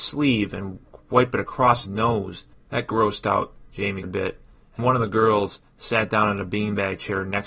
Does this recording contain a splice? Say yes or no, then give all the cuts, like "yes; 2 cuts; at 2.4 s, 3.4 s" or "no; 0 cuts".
yes; 3 cuts; at 1.8 s, 4.0 s, 4.8 s